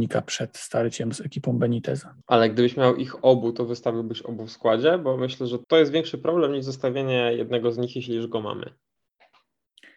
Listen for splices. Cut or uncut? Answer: cut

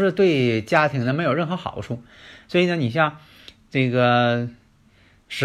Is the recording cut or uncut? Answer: uncut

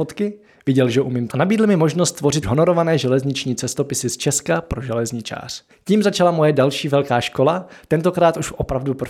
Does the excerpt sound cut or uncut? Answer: cut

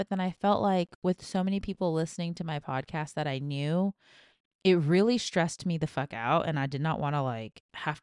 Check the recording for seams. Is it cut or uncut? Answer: uncut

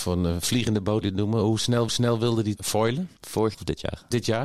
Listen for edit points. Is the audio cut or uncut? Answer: cut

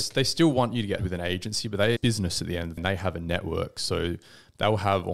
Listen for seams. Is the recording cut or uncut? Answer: cut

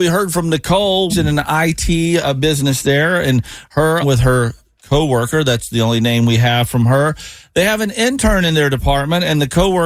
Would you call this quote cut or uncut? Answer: cut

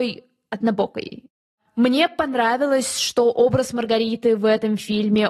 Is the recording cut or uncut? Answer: uncut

